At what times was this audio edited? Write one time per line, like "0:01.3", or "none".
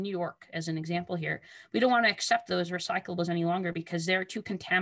none